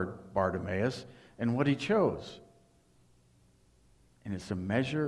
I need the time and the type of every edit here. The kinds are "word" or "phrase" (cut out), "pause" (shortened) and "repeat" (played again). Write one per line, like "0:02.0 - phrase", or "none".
none